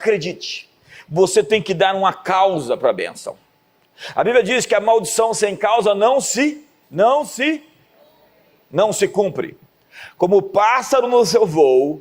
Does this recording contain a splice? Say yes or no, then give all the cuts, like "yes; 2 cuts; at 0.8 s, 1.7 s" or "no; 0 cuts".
no; 0 cuts